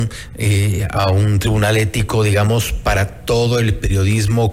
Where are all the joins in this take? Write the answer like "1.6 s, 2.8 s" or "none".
1.0 s